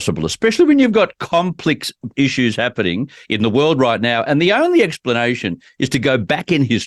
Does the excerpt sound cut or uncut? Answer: cut